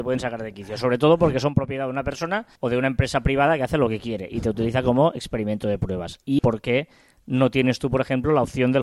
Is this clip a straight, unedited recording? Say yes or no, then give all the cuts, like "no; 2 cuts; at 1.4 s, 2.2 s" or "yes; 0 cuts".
no; 2 cuts; at 2.6 s, 6.4 s